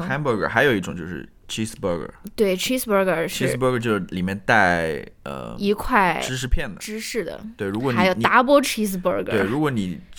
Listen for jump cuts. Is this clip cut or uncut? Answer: uncut